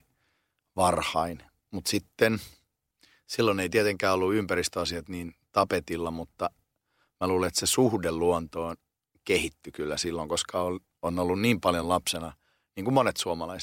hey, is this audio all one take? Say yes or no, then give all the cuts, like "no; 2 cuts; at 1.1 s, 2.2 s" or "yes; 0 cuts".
yes; 0 cuts